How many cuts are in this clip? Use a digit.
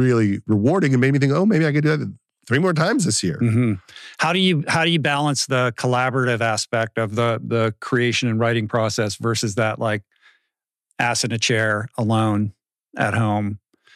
0